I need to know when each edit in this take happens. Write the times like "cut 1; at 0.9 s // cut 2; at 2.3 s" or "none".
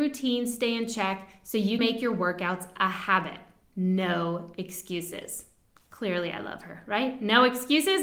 cut 1; at 1.8 s